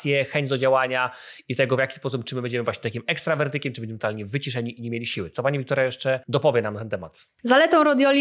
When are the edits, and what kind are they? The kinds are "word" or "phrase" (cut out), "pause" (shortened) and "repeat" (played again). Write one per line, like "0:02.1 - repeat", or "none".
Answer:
0:06.2 - pause